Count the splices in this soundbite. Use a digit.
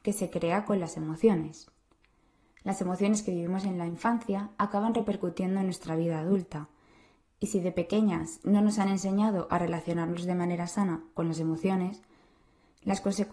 0